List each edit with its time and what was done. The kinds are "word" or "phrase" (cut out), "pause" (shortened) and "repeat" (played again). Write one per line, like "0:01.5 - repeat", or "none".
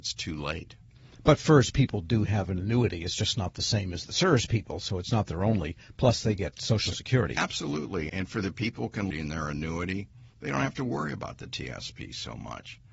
0:08.1 - word
0:09.1 - phrase
0:10.3 - pause